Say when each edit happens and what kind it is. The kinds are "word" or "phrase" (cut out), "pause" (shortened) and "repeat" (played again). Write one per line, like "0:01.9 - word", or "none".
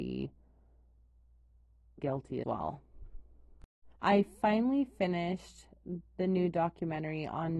0:02.0 - word
0:02.4 - word
0:03.9 - pause